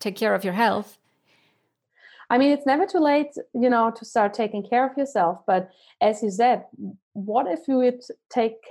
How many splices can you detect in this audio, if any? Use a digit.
0